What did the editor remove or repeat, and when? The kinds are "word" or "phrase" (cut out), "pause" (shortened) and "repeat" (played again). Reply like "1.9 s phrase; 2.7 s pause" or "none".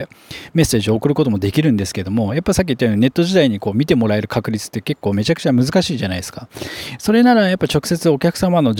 none